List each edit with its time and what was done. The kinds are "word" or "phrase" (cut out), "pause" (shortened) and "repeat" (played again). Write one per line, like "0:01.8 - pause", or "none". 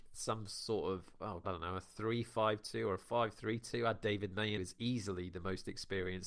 0:01.4 - word
0:04.6 - phrase